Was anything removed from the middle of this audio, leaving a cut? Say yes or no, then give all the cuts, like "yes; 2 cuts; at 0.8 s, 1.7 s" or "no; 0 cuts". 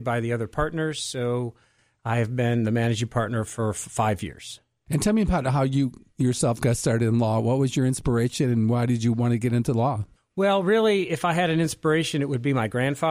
no; 0 cuts